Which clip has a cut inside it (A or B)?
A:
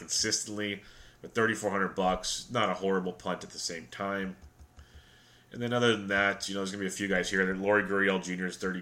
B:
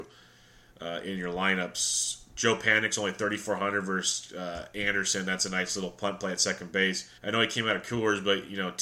B